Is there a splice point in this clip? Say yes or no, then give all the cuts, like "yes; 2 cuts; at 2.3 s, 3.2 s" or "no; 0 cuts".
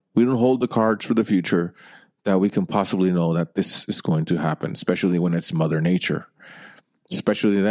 no; 0 cuts